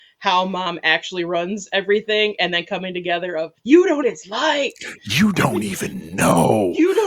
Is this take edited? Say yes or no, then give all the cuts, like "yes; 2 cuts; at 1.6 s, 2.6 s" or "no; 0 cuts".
yes; 2 cuts; at 3.6 s, 4.0 s